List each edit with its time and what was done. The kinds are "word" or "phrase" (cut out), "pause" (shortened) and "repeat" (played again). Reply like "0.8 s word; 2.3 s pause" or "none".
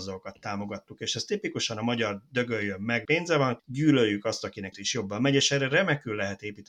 3.0 s word; 3.6 s word; 4.7 s word